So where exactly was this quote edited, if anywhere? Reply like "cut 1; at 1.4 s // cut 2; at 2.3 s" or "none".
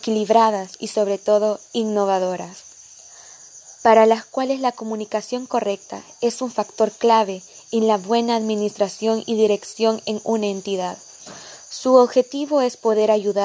none